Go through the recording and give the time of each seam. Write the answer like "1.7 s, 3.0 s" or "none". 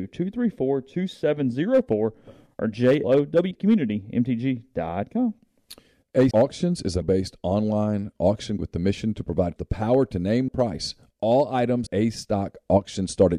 3.0 s, 3.5 s, 6.3 s, 7.0 s, 8.6 s, 9.6 s, 10.5 s, 11.9 s